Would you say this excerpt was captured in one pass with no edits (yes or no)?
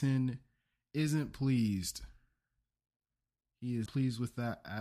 no